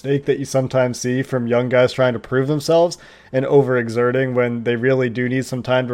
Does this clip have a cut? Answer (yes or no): no